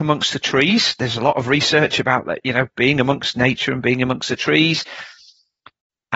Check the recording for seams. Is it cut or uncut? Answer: uncut